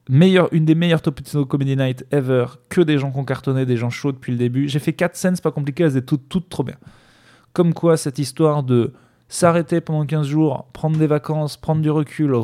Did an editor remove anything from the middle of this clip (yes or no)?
no